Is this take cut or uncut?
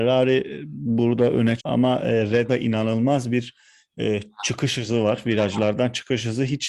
cut